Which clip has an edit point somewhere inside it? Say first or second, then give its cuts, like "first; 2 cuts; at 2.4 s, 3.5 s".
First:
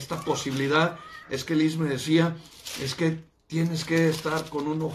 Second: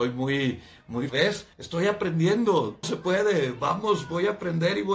second; 3 cuts; at 1.1 s, 1.5 s, 2.8 s